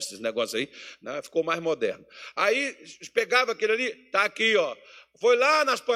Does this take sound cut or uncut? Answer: uncut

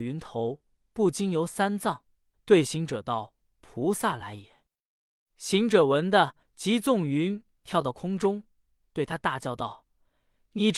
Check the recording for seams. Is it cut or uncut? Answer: cut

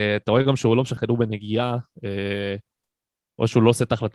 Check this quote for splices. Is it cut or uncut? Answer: cut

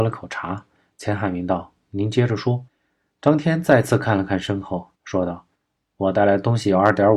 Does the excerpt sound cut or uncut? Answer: cut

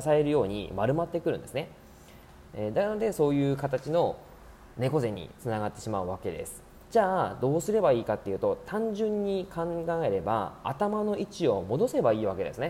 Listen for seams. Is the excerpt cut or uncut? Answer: cut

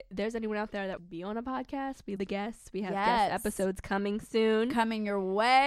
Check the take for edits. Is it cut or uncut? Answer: cut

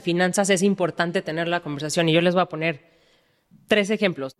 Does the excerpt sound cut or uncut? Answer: uncut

